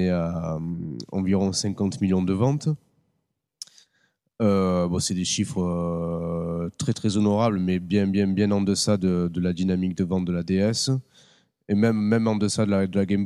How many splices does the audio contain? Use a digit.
0